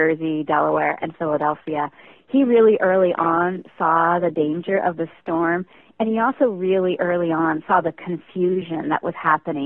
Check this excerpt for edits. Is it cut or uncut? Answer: uncut